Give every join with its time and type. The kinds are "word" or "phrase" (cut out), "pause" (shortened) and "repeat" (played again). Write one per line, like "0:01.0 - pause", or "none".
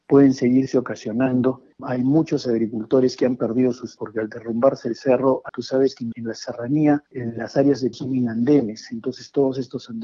0:01.7 - pause
0:04.0 - word
0:05.5 - word
0:06.1 - word
0:07.1 - pause
0:07.9 - word